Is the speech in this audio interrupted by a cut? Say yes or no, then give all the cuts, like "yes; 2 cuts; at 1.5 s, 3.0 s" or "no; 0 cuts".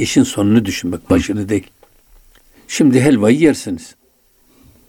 no; 0 cuts